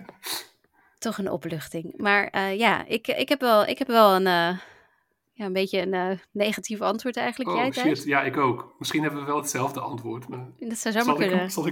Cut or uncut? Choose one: uncut